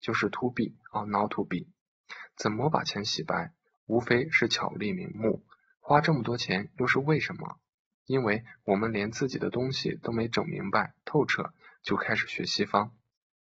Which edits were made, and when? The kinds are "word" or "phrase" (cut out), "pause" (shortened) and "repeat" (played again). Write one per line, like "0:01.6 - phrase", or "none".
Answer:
none